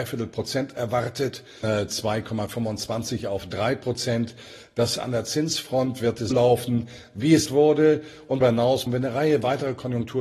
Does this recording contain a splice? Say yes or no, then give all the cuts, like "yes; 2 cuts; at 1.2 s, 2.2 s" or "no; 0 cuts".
yes; 6 cuts; at 1.6 s, 5.0 s, 6.3 s, 7.5 s, 8.4 s, 8.9 s